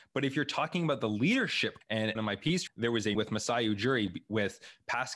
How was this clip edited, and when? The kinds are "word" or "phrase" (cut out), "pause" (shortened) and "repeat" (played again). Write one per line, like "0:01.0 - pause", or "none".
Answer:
0:01.8 - word
0:02.2 - phrase
0:02.7 - word
0:03.1 - word